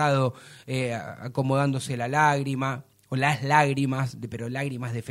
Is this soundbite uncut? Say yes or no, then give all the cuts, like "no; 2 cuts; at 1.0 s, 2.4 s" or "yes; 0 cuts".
yes; 0 cuts